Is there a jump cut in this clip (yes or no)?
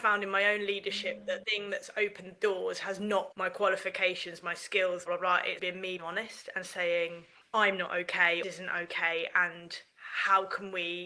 yes